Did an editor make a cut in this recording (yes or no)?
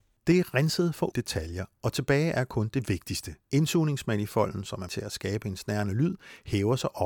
yes